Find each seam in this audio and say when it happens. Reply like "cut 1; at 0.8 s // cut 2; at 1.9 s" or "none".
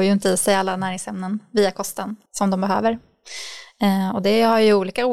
cut 1; at 2.3 s